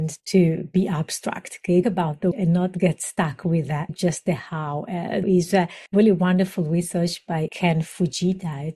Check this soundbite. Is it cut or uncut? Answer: cut